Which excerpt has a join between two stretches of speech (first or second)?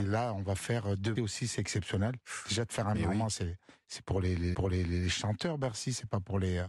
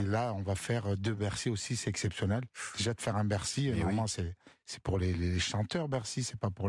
first